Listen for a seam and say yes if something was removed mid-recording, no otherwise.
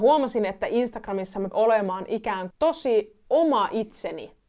yes